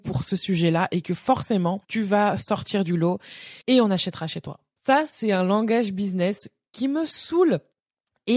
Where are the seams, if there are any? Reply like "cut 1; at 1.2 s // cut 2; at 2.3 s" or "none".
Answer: cut 1; at 1.8 s // cut 2; at 3.6 s // cut 3; at 4.8 s